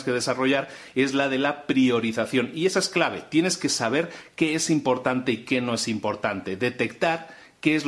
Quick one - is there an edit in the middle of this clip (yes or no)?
no